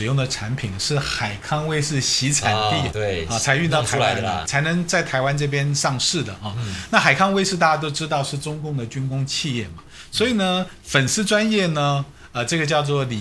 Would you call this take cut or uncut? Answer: cut